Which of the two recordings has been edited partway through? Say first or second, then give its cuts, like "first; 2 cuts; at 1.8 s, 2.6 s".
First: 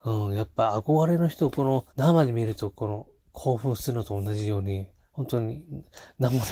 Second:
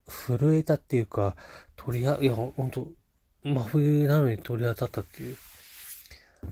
first; 1 cut; at 1.9 s